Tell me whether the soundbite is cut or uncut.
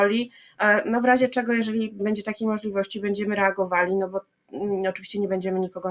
cut